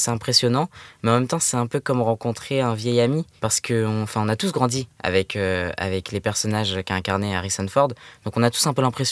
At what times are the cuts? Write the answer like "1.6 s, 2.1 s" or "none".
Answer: none